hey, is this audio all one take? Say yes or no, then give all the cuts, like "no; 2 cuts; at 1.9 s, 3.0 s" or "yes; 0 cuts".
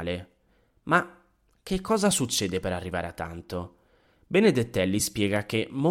yes; 0 cuts